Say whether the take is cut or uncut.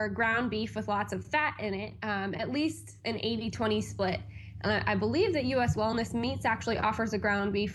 uncut